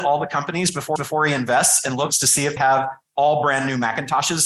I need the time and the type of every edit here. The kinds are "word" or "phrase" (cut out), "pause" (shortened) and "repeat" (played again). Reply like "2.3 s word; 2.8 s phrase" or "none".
1.0 s repeat; 2.6 s word